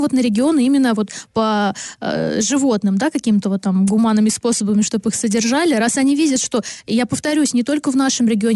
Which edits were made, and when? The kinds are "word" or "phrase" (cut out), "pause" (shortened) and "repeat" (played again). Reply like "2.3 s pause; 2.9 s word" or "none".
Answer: none